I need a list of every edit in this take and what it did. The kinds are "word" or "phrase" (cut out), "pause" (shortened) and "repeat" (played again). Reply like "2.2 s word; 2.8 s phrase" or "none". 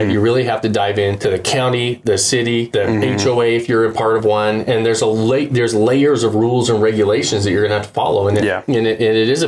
none